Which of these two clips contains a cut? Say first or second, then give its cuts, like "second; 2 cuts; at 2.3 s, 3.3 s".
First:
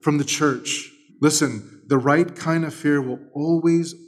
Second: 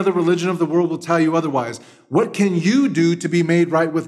first; 1 cut; at 1.1 s